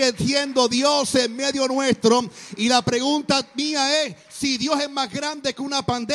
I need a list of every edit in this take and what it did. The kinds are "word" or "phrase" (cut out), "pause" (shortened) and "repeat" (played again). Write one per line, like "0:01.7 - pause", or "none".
none